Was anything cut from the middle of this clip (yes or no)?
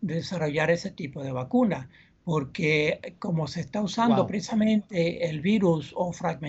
no